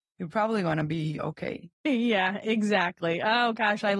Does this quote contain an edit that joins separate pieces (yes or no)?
yes